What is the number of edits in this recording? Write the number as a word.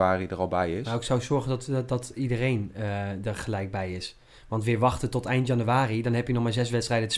zero